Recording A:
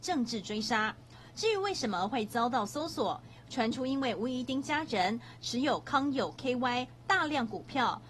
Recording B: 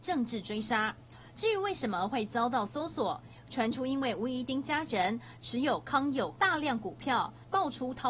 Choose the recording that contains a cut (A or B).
B